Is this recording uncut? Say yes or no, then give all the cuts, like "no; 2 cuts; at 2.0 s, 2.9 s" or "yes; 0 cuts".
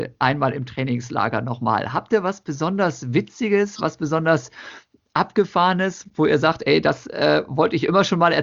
yes; 0 cuts